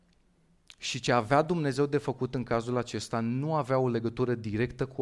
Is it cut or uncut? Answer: uncut